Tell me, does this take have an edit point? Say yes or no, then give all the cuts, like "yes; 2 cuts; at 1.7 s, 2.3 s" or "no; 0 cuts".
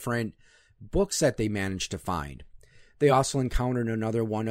no; 0 cuts